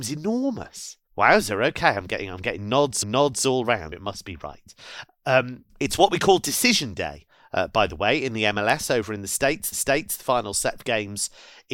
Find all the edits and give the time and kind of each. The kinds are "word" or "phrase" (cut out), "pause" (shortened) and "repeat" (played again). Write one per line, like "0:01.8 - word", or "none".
0:01.1 - pause
0:03.0 - repeat
0:03.9 - word
0:05.7 - pause
0:09.7 - repeat